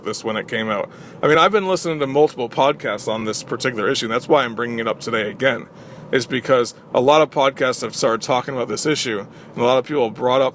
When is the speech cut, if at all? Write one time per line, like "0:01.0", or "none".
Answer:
none